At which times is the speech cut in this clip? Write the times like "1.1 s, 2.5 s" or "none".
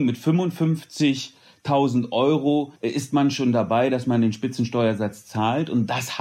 2.8 s